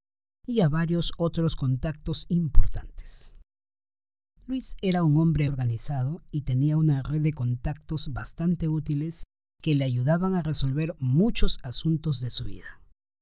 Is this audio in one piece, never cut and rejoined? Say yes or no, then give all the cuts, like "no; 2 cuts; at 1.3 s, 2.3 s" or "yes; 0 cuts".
no; 1 cut; at 5.5 s